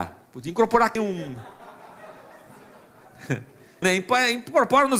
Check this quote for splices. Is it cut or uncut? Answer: cut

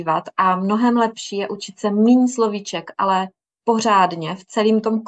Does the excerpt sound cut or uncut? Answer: uncut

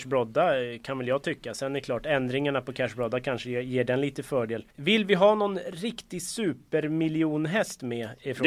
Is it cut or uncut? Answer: cut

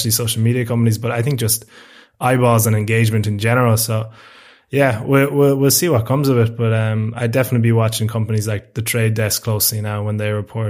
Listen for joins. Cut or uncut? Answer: uncut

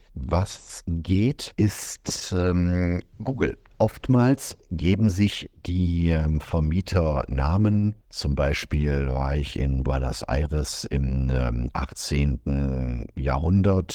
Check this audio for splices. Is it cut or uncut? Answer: uncut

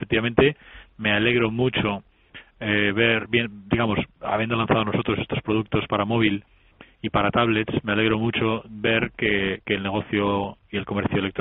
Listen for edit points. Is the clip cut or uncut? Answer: uncut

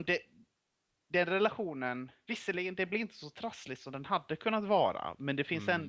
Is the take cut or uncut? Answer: uncut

